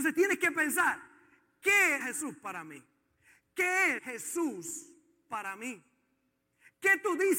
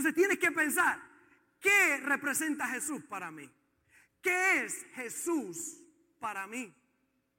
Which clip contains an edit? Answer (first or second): first